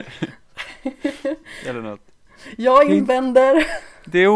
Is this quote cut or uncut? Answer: uncut